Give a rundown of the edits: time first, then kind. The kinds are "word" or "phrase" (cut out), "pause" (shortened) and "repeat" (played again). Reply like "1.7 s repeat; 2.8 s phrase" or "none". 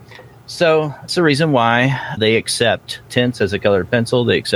1.1 s word; 2.2 s word; 3.1 s word

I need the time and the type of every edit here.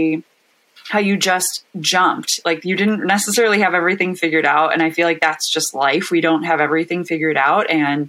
none

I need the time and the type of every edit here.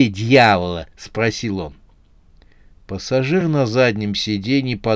none

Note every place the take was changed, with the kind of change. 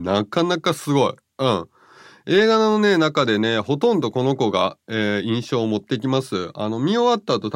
none

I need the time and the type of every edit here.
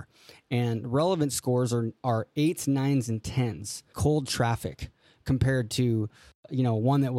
3.9 s word

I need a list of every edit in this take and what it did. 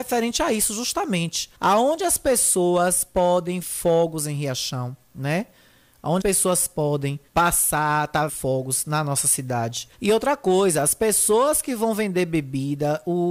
1.5 s pause; 3.6 s word; 5.0 s pause; 6.2 s word; 7.3 s pause; 8.3 s word; 9.9 s pause

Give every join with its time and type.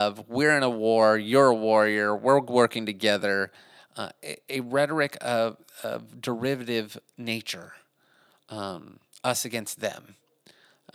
none

